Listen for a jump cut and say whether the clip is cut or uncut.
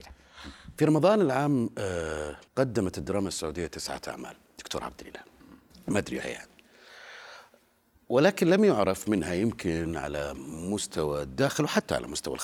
cut